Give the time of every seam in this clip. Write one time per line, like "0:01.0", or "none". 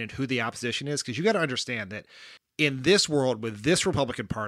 0:02.4